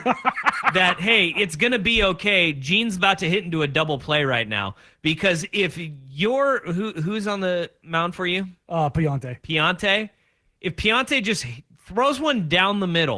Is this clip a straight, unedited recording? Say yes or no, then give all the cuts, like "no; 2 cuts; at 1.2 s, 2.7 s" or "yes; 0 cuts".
yes; 0 cuts